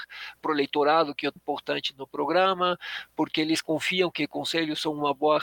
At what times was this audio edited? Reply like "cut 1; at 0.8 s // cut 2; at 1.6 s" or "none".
cut 1; at 1.4 s